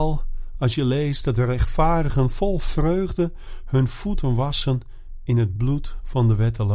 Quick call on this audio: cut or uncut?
uncut